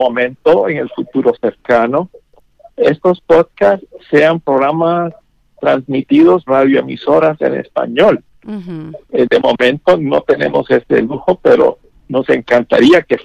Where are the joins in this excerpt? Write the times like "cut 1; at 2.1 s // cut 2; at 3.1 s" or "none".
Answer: cut 1; at 6.5 s

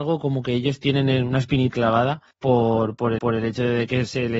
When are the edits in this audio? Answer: cut 1; at 1.7 s // cut 2; at 2.3 s // cut 3; at 3.2 s

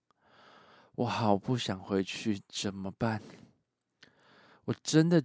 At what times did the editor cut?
none

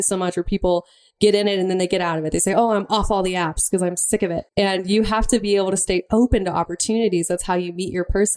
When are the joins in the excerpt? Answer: cut 1; at 4.5 s

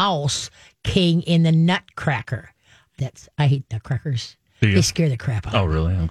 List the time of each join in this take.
cut 1; at 3.0 s

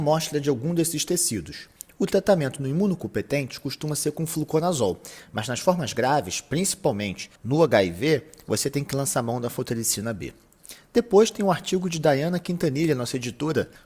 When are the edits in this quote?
cut 1; at 7.4 s

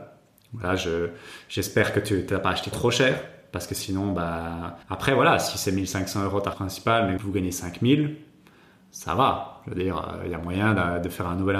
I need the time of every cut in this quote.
cut 1; at 2.7 s // cut 2; at 4.8 s // cut 3; at 6.5 s // cut 4; at 7.2 s

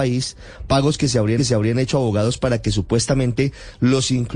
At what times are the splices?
cut 1; at 1.4 s

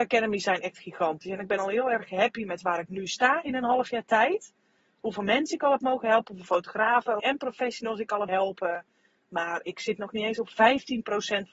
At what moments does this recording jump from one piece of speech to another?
cut 1; at 7.2 s // cut 2; at 8.3 s

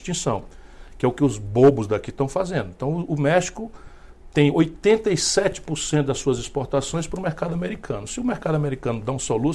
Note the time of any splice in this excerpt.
none

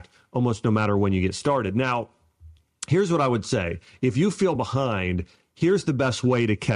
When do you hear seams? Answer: none

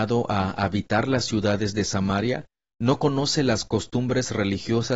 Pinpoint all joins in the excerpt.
none

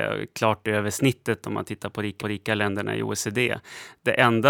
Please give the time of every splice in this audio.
cut 1; at 2.2 s

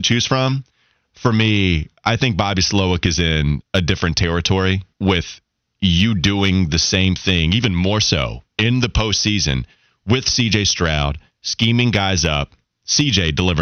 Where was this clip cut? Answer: cut 1; at 4.9 s

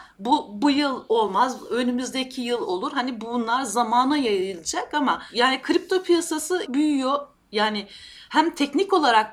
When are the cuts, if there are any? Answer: cut 1; at 6.7 s

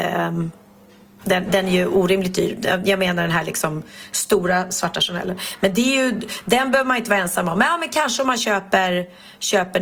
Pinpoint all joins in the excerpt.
none

